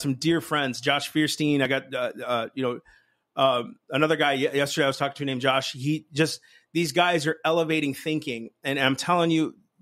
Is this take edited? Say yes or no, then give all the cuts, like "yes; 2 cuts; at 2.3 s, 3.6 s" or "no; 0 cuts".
no; 0 cuts